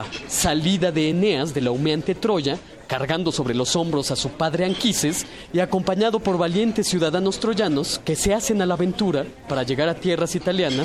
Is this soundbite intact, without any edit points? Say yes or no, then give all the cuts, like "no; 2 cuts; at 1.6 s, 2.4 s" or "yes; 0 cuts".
yes; 0 cuts